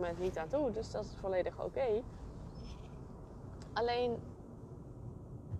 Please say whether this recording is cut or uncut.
uncut